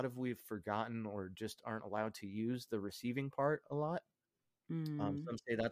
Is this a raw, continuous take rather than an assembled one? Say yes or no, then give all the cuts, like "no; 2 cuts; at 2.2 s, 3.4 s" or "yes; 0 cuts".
yes; 0 cuts